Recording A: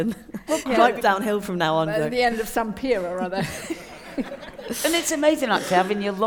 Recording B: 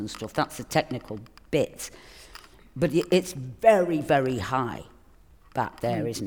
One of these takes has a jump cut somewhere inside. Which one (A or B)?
A